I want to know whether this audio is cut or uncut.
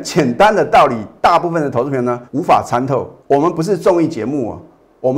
cut